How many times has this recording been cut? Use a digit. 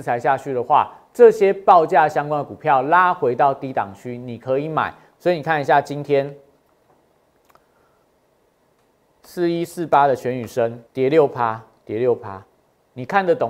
1